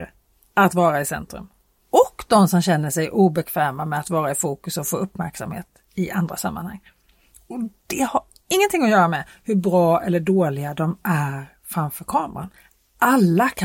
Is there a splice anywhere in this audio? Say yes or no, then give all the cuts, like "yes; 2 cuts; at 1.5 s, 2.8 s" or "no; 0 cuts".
no; 0 cuts